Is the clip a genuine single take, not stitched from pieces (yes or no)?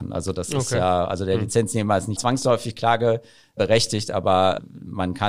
no